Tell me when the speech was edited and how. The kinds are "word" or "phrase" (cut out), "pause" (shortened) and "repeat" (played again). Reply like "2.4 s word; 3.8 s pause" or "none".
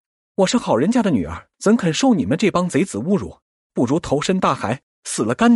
1.5 s pause